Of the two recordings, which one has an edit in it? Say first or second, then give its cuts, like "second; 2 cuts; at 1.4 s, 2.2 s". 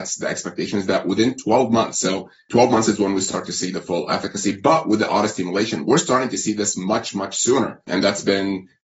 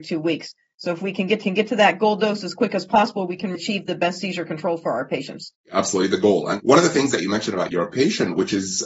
second; 3 cuts; at 1.4 s, 3.5 s, 5.6 s